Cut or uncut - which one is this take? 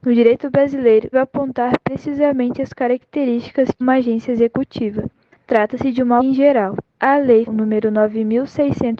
cut